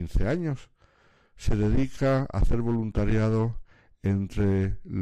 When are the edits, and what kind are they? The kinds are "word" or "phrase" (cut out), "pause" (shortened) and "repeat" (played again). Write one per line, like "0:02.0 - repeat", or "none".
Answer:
none